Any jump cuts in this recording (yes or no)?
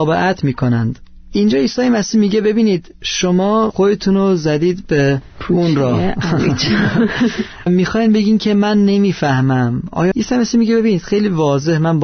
yes